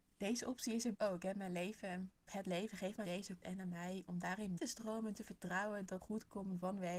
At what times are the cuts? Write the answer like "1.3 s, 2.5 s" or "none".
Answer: 0.9 s, 2.3 s, 3.0 s, 3.4 s, 4.1 s, 4.6 s, 6.0 s